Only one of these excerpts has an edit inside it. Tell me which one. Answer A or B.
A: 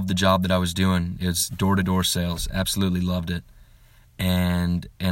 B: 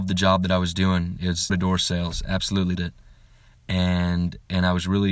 B